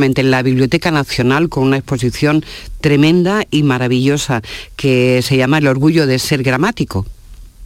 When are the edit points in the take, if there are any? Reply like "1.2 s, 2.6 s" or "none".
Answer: none